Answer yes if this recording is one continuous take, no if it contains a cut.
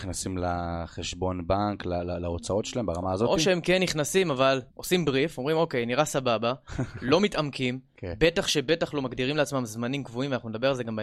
no